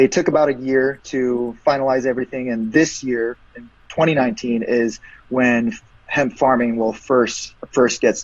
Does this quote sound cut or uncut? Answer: uncut